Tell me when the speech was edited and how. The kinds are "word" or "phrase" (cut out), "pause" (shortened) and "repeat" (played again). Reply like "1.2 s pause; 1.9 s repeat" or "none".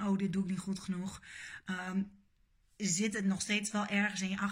none